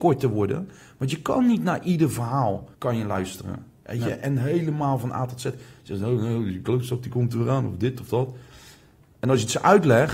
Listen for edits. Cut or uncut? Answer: cut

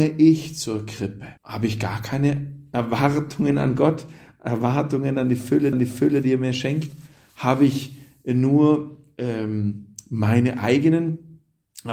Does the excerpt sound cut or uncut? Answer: cut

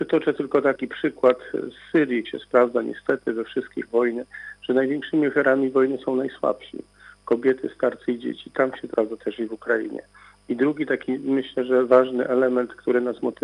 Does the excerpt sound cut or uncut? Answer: cut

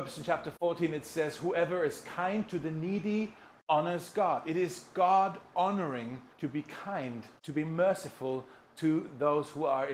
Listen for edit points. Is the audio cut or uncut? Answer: cut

